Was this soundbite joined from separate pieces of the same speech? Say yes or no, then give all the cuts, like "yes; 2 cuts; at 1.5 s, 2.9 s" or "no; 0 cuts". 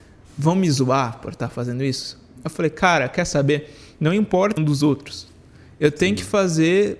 yes; 1 cut; at 4.6 s